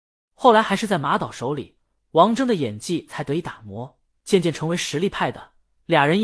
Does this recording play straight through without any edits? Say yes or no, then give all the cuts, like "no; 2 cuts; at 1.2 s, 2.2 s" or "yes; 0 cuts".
yes; 0 cuts